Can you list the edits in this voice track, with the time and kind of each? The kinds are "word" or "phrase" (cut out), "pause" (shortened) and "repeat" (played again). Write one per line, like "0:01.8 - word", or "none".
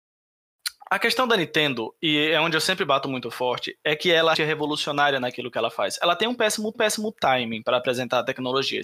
0:04.3 - word
0:06.7 - repeat